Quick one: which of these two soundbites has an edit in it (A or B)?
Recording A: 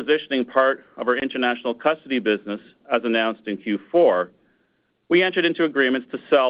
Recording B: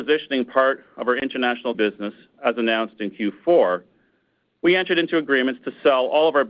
B